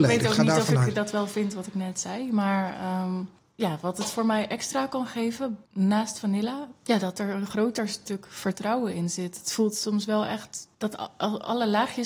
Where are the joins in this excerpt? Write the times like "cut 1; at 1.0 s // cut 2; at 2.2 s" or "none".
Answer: cut 1; at 5.6 s